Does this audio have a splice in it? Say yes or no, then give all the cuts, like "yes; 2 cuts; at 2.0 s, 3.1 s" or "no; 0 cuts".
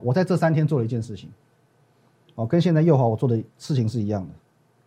no; 0 cuts